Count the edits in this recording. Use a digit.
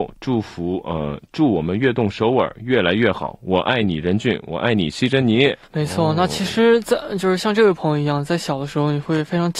1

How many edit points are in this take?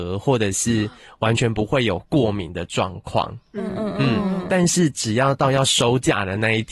0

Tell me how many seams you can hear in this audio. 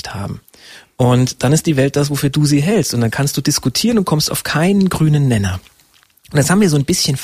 0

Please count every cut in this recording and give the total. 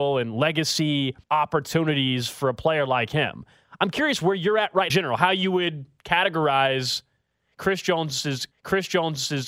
3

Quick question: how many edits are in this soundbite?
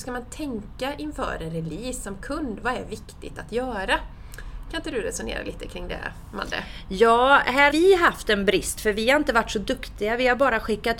1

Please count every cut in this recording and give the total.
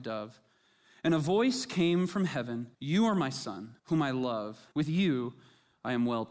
3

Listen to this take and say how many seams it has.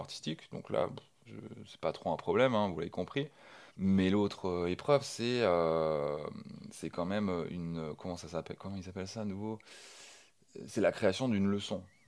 2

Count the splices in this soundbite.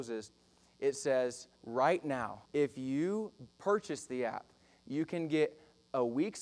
4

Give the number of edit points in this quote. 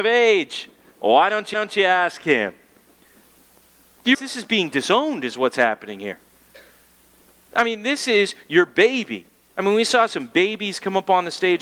2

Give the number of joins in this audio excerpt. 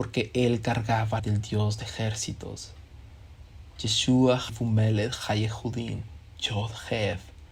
3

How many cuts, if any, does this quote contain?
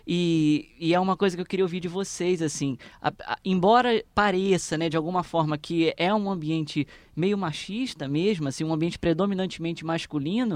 0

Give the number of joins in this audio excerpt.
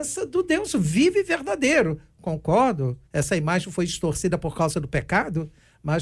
1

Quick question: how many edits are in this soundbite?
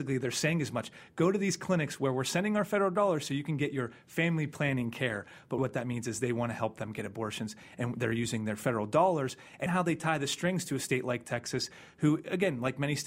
2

